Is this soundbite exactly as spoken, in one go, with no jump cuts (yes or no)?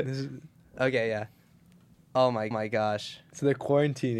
no